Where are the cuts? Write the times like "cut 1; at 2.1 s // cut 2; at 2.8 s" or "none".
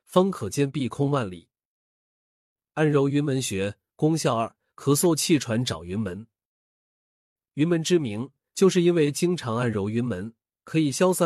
none

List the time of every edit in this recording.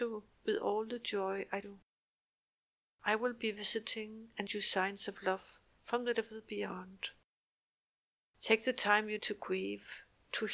cut 1; at 1.6 s // cut 2; at 4.5 s // cut 3; at 6.1 s // cut 4; at 9.2 s

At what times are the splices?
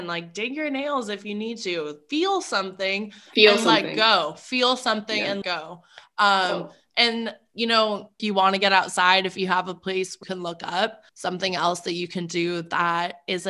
cut 1; at 5.4 s // cut 2; at 8.2 s // cut 3; at 10.2 s // cut 4; at 11.1 s

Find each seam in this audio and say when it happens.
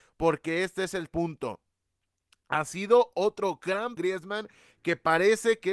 cut 1; at 1.1 s // cut 2; at 4.0 s

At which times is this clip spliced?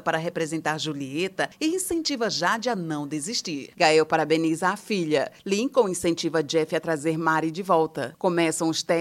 none

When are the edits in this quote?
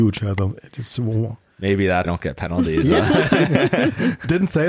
cut 1; at 2.0 s

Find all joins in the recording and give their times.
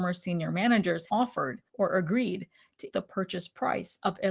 cut 1; at 1.1 s // cut 2; at 1.7 s // cut 3; at 2.9 s

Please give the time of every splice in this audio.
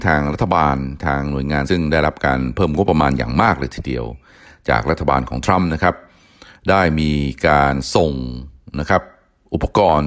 cut 1; at 1.7 s

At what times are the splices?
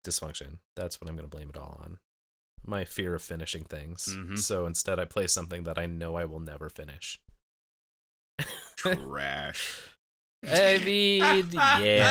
none

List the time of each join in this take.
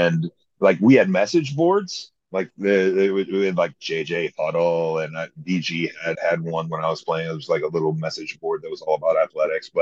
cut 1; at 6.1 s

